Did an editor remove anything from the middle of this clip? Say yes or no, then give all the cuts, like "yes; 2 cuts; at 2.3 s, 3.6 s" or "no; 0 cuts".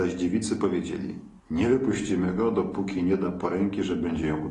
yes; 1 cut; at 1.4 s